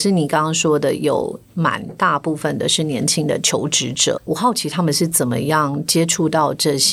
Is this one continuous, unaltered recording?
no; 1 cut; at 4.2 s

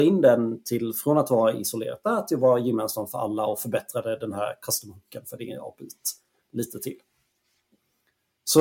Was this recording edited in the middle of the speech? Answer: no; 0 cuts

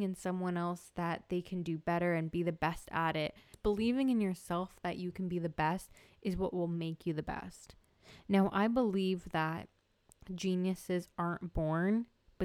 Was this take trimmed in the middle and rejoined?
no; 0 cuts

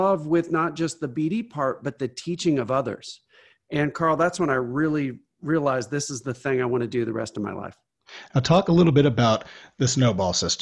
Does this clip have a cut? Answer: no; 0 cuts

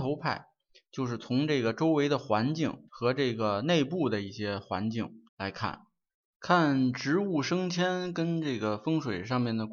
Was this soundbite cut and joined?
yes; 3 cuts; at 2.9 s, 5.3 s, 6.1 s

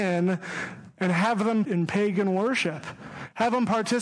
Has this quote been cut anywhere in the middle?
yes; 1 cut; at 1.6 s

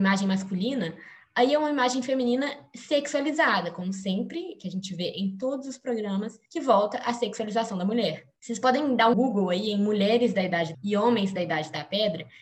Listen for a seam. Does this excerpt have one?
yes; 4 cuts; at 6.4 s, 8.4 s, 9.1 s, 10.7 s

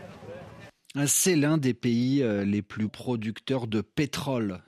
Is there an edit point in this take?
yes; 1 cut; at 2.9 s

